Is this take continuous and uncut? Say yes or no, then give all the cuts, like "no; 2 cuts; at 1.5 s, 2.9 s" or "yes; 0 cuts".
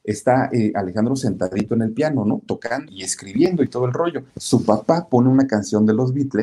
no; 2 cuts; at 2.9 s, 4.3 s